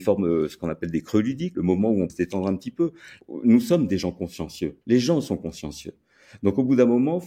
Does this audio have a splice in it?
yes; 3 cuts; at 1.6 s, 2.1 s, 4.8 s

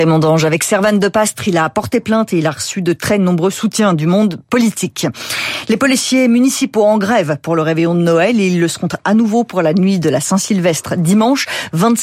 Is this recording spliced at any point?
no; 0 cuts

